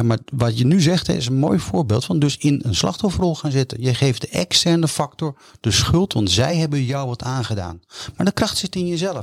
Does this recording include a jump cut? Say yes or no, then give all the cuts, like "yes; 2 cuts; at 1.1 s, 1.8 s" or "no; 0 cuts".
no; 0 cuts